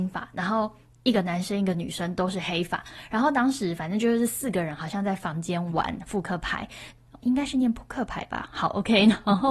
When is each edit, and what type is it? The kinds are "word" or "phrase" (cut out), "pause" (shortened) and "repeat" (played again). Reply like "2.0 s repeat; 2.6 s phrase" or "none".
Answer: 7.2 s word